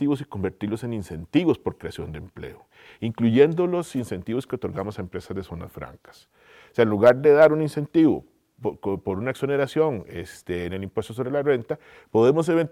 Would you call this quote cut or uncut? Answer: uncut